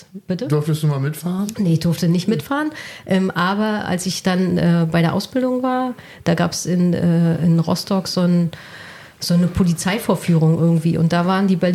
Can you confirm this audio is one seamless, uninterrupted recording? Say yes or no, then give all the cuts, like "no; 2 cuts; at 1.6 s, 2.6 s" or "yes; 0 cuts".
yes; 0 cuts